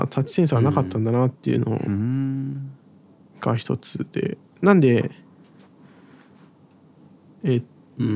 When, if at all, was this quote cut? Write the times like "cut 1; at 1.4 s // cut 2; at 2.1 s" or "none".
none